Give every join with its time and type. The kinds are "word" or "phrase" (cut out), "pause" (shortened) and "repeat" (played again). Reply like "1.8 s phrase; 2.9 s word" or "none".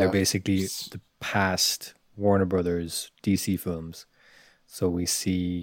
none